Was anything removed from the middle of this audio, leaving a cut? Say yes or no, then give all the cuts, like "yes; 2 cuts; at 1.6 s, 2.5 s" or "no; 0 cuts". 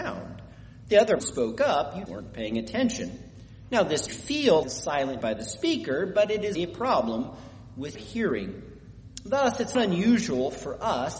yes; 8 cuts; at 1.2 s, 2.1 s, 4.1 s, 4.6 s, 5.2 s, 6.5 s, 7.9 s, 9.7 s